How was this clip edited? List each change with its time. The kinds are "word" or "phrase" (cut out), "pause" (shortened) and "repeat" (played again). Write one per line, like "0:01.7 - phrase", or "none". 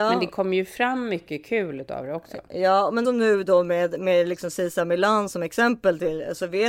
0:03.0 - phrase

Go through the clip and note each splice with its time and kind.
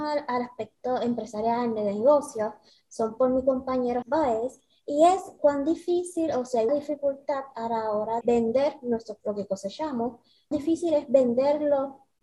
0:04.0 - word
0:05.4 - word
0:06.7 - word
0:08.2 - word
0:09.2 - word
0:10.5 - word

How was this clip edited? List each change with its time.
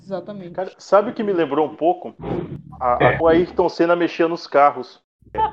0:03.2 - word

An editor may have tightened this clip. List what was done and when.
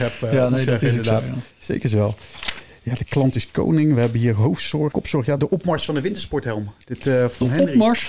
0:01.5 - pause
0:04.9 - word
0:05.4 - word

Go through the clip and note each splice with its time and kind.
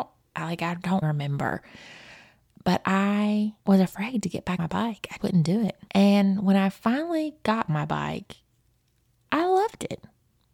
0:01.0 - word
0:03.6 - pause
0:04.6 - word
0:05.2 - word
0:05.9 - pause
0:07.7 - phrase

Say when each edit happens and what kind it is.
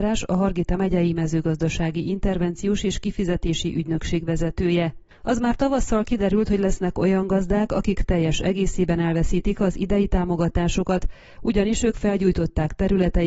none

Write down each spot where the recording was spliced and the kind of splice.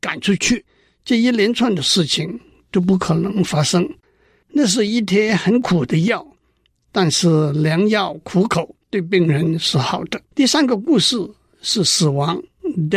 0:08.8 - pause
0:10.3 - pause

